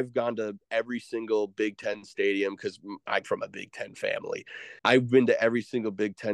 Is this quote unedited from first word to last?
no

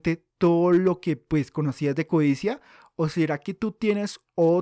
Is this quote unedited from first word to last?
yes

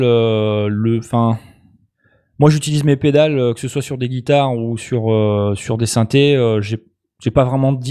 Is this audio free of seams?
yes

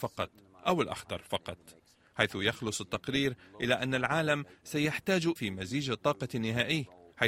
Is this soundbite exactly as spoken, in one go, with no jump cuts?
no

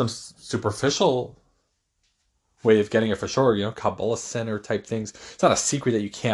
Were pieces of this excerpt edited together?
no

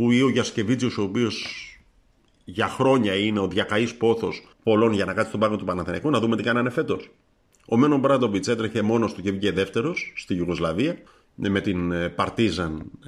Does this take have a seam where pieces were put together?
yes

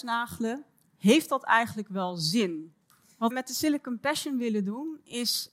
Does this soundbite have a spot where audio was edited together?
yes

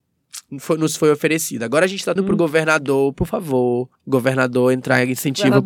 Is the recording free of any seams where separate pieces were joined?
no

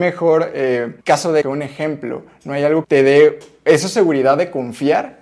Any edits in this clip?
yes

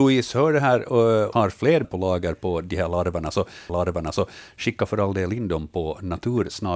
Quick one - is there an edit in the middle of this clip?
yes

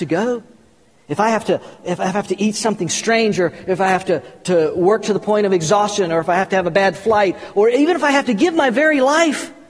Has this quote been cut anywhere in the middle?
no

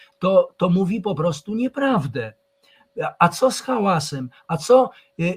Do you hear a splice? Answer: no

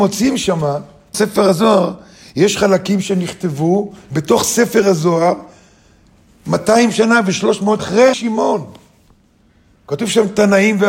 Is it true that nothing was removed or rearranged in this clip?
no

